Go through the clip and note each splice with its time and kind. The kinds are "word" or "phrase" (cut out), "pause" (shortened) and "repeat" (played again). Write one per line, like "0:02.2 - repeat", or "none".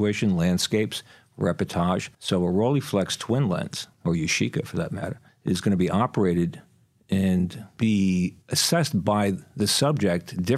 0:02.1 - pause
0:03.9 - pause
0:05.3 - pause
0:08.4 - pause